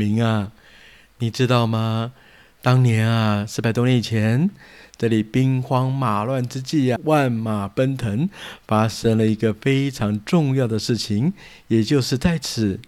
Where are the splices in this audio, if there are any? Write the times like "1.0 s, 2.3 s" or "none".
7.0 s

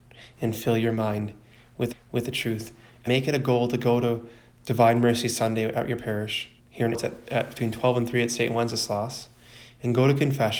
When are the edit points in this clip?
1.9 s, 3.1 s, 6.6 s, 6.9 s

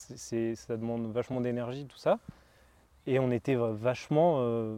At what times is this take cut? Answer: none

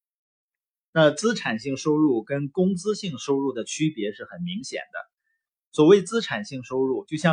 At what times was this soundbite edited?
none

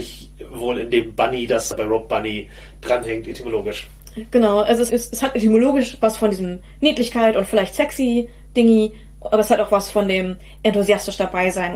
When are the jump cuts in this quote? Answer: none

